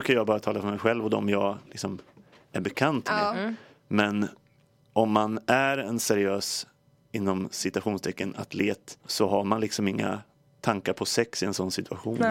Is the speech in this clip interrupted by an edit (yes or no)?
yes